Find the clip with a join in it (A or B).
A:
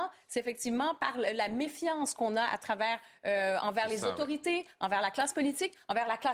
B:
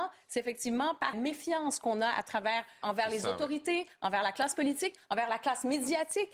B